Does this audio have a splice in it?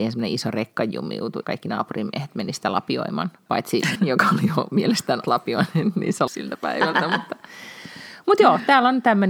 yes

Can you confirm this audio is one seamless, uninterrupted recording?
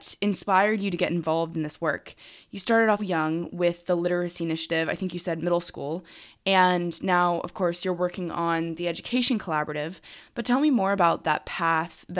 no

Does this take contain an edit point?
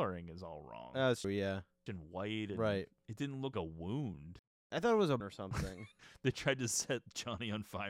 yes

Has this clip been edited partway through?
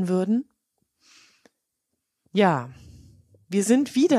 no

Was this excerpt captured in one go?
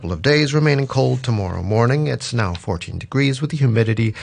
yes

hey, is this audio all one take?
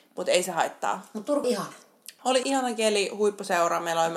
no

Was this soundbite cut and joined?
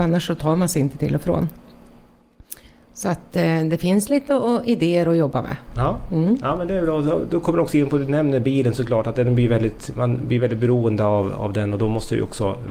yes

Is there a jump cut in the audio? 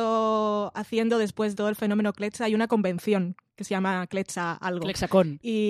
yes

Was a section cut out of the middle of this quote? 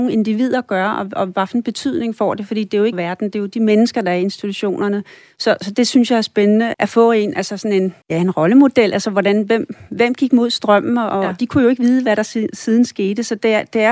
yes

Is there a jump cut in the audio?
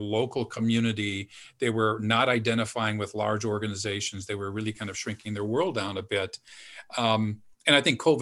no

